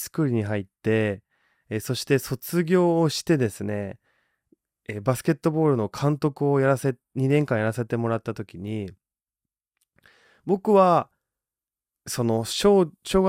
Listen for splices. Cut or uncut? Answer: uncut